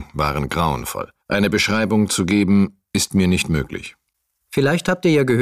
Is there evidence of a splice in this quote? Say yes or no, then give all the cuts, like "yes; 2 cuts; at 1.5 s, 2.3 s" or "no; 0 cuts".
yes; 1 cut; at 1.2 s